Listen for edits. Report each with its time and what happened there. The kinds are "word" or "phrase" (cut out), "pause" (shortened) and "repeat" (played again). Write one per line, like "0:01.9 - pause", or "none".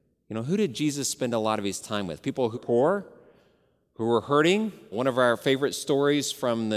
0:02.5 - word
0:04.9 - word

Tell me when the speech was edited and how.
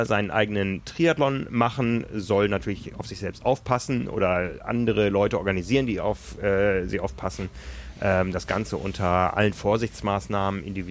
none

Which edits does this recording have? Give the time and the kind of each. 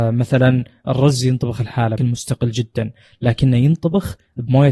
0:02.0 - word

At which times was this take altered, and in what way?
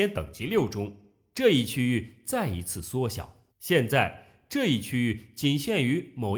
0:03.5 - pause

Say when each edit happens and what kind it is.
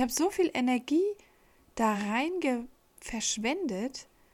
none

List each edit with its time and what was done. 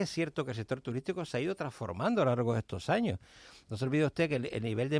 none

